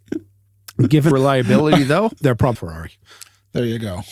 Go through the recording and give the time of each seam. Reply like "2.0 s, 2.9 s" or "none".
1.1 s, 2.2 s, 2.5 s